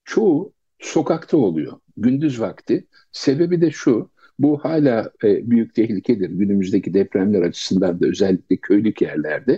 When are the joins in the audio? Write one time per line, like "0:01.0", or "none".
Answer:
none